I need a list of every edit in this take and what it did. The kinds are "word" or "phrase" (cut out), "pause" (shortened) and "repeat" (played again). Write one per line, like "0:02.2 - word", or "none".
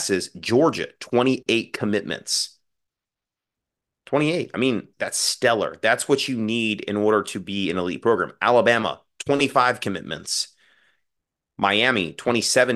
0:04.9 - word

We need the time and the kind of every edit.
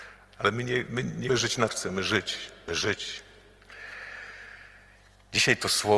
0:01.3 - word
0:01.7 - word
0:02.7 - word

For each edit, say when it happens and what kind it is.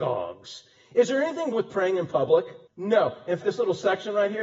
0:01.5 - word
0:02.7 - pause
0:03.4 - word

